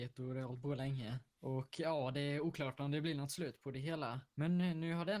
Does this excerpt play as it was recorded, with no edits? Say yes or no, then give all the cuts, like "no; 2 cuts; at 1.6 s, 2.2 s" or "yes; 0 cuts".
no; 2 cuts; at 1.3 s, 4.3 s